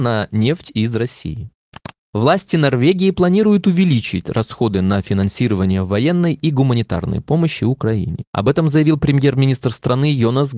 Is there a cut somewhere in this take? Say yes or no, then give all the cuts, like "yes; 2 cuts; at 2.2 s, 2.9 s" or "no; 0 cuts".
no; 0 cuts